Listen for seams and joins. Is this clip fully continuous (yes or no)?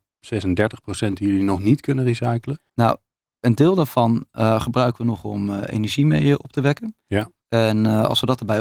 no